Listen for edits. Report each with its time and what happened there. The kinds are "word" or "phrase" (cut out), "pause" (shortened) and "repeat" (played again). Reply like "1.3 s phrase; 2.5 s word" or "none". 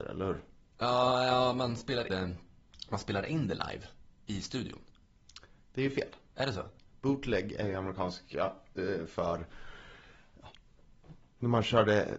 2.1 s word